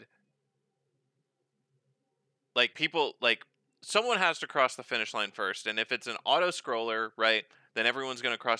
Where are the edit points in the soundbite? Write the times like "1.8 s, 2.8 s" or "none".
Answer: 2.7 s

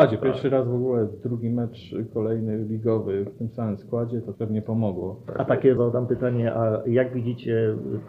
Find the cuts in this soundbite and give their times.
4.3 s, 5.8 s

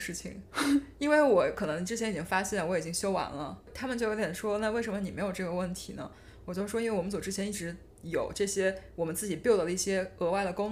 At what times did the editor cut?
none

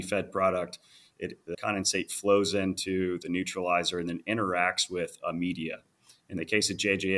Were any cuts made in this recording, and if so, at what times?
1.5 s

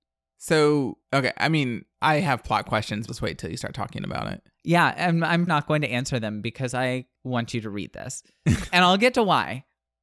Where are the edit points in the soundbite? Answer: 1.0 s, 1.9 s, 3.1 s, 5.5 s, 7.1 s, 8.7 s

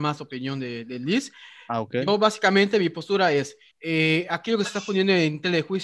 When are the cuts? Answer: 3.7 s

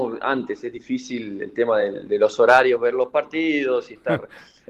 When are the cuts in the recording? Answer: none

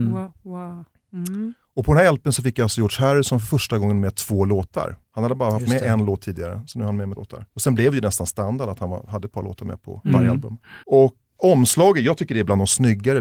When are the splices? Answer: 5.1 s, 7.2 s, 7.5 s, 10.8 s, 11.4 s

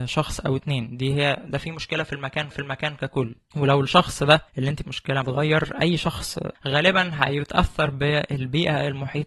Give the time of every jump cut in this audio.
2.5 s, 4.5 s, 4.8 s, 5.2 s, 6.6 s

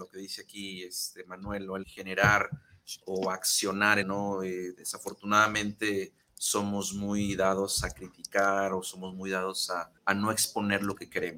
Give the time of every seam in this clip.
1.8 s, 4.0 s, 6.2 s, 10.0 s

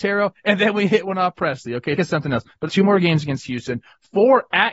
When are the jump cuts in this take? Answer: 2.0 s, 2.7 s

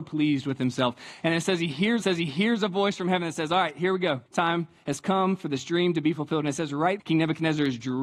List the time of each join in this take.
2.0 s, 4.3 s, 7.0 s

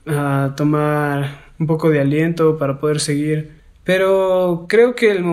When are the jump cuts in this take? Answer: 3.6 s

